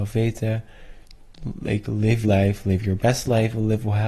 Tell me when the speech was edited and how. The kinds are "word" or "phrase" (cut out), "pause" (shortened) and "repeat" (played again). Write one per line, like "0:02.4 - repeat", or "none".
0:02.2 - word